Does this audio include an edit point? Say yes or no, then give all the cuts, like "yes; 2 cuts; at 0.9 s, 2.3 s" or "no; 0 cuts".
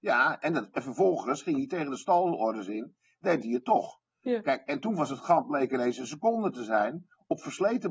no; 0 cuts